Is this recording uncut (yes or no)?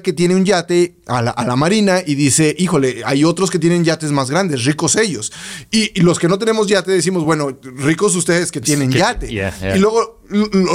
yes